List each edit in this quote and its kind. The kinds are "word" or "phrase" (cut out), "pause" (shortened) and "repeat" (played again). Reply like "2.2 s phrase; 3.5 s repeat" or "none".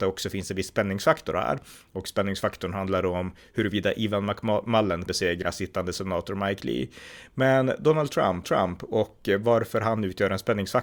5.1 s word; 8.4 s repeat